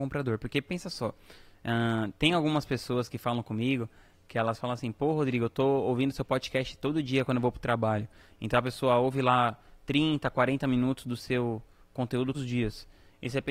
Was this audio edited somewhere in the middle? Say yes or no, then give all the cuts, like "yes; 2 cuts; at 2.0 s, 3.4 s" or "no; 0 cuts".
yes; 1 cut; at 12.3 s